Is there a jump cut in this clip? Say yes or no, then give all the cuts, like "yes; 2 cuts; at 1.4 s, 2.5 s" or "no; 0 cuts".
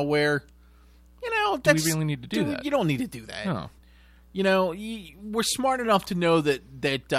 no; 0 cuts